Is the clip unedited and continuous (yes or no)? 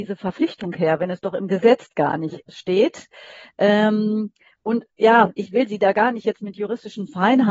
yes